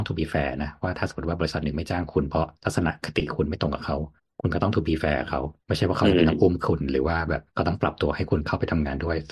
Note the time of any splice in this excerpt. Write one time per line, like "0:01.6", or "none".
0:02.6
0:04.2
0:05.6
0:07.5